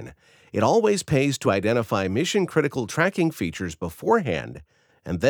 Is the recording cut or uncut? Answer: uncut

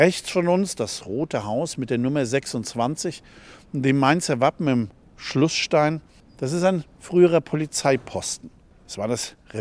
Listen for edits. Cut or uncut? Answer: uncut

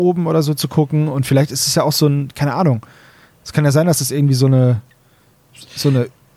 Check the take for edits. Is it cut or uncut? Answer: uncut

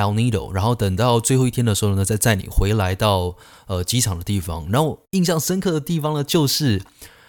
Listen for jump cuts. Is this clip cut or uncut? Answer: uncut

